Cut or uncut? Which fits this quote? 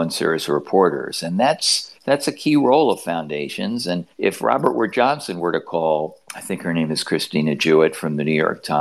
cut